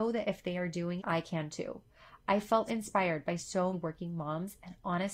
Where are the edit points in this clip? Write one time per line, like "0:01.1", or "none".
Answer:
0:01.0
0:02.7
0:03.7